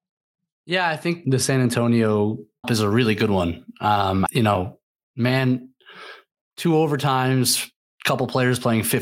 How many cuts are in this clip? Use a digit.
3